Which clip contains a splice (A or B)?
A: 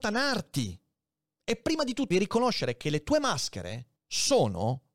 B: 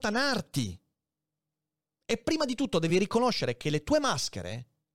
A